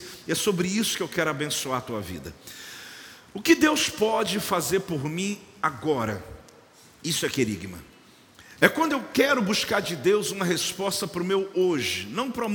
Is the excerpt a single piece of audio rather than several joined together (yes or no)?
yes